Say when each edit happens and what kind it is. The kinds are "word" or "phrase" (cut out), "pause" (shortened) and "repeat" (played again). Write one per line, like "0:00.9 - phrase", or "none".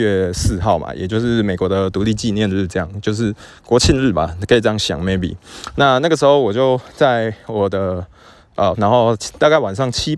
0:08.7 - phrase